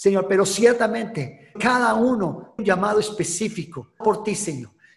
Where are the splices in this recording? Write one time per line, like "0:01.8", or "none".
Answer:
0:01.6
0:02.6
0:04.0